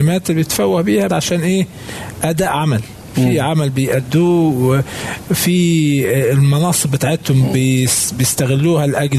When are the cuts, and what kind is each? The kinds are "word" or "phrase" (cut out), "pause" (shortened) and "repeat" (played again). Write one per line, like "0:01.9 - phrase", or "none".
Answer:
0:01.1 - word